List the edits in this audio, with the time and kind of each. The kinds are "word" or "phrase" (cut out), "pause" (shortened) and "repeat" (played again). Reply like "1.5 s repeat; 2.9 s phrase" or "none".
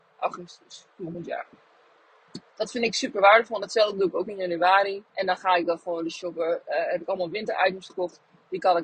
2.5 s pause; 5.1 s pause